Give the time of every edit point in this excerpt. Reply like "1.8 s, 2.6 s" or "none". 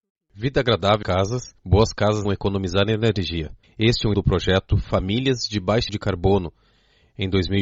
1.0 s, 1.6 s, 2.2 s, 3.6 s, 4.1 s, 5.9 s